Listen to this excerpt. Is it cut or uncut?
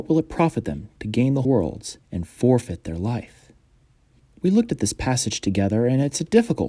cut